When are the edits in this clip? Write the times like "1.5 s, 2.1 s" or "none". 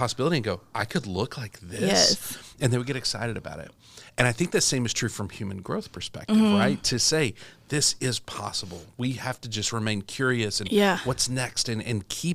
none